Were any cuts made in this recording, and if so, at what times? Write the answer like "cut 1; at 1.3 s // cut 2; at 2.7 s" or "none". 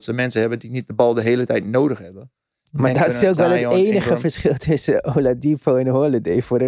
none